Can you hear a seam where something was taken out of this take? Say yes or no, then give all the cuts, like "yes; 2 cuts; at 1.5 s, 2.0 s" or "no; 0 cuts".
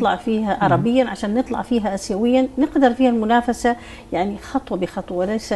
no; 0 cuts